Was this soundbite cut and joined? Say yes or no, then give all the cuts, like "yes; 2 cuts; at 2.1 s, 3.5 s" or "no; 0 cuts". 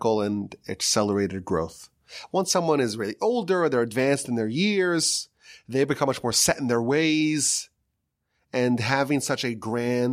no; 0 cuts